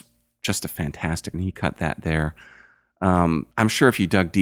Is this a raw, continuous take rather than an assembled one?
no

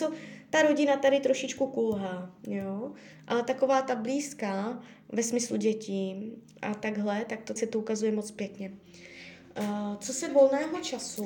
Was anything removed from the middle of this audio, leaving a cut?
yes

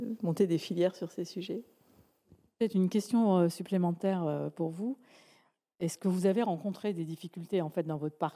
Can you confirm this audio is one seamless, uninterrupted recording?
yes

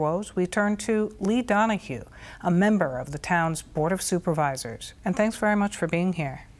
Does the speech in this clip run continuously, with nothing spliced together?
yes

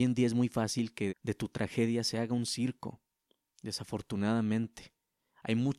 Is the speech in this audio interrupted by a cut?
yes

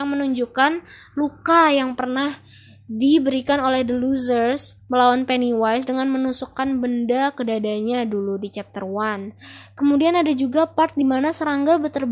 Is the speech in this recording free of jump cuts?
yes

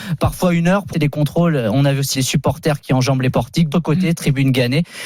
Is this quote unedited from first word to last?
no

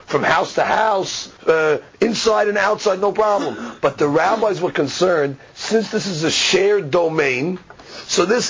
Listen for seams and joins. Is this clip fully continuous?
no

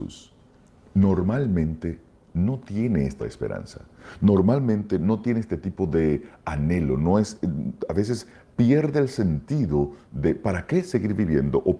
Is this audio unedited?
no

